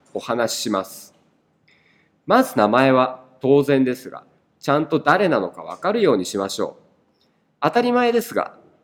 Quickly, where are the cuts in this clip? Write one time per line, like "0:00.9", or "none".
none